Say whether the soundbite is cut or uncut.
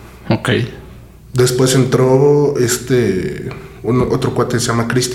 uncut